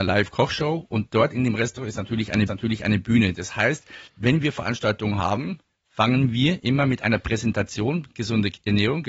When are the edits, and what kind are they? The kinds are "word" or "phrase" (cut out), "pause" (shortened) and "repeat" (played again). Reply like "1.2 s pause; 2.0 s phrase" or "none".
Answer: 2.5 s repeat; 4.1 s pause